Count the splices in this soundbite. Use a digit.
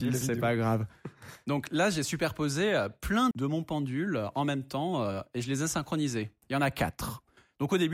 1